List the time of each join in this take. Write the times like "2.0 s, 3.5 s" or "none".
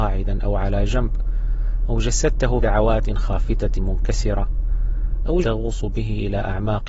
2.6 s, 3.8 s, 5.4 s